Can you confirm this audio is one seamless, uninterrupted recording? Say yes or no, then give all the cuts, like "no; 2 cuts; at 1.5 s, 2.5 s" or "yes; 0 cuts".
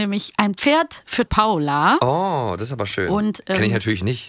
no; 1 cut; at 1.3 s